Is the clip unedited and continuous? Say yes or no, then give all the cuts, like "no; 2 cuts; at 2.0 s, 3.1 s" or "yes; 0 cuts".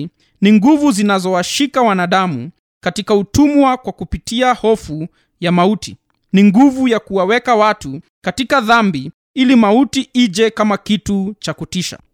yes; 0 cuts